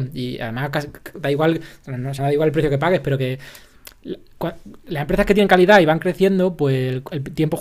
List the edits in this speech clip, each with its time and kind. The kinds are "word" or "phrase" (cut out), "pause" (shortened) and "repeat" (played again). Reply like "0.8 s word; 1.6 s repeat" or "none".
2.2 s word